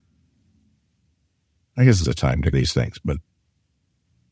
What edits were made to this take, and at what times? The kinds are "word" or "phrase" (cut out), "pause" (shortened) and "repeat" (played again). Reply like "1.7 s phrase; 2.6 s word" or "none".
2.0 s word; 2.5 s word